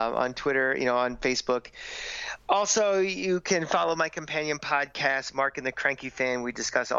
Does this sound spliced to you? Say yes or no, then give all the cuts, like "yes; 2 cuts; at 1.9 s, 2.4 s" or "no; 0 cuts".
no; 0 cuts